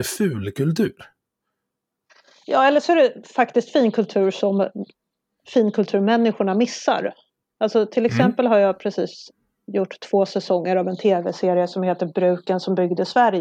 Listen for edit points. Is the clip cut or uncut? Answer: uncut